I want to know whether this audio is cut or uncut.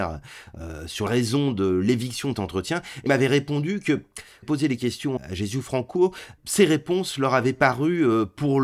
cut